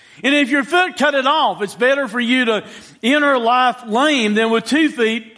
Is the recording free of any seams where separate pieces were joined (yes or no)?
no